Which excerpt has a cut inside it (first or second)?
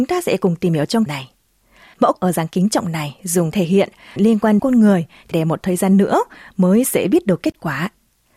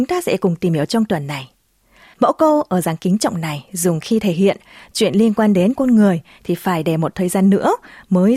first